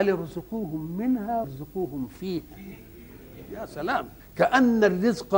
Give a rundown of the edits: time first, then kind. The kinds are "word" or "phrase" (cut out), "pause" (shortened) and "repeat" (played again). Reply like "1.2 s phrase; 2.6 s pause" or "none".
1.4 s word; 4.2 s pause